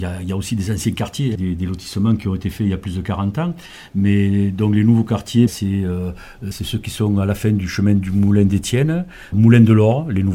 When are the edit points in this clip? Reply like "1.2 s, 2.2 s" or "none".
1.4 s, 5.5 s, 6.5 s, 9.3 s